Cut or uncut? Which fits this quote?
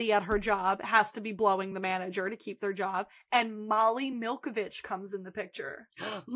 uncut